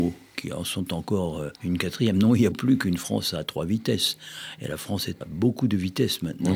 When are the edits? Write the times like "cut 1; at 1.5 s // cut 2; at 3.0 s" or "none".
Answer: cut 1; at 1.6 s // cut 2; at 2.5 s // cut 3; at 5.2 s